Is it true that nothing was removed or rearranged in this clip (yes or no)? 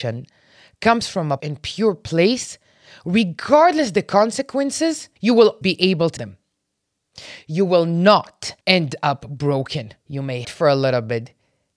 no